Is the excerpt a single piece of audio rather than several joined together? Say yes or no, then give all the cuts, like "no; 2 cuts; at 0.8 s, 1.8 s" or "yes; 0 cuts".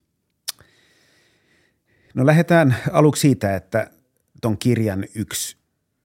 yes; 0 cuts